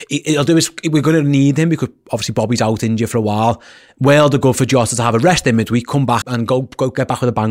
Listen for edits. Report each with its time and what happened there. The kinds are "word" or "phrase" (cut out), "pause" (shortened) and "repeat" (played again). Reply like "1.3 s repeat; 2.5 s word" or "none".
6.2 s word